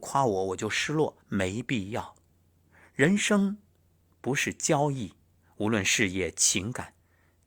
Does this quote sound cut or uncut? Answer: cut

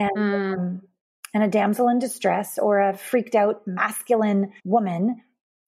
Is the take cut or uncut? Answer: cut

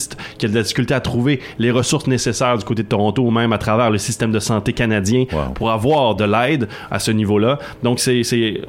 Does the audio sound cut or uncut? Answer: uncut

